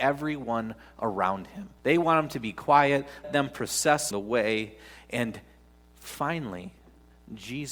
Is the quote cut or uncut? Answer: cut